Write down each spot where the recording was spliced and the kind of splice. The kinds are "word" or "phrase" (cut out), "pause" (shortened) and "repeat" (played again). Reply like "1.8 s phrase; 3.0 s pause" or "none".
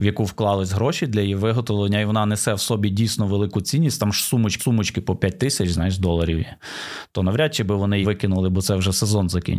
4.6 s repeat; 8.0 s phrase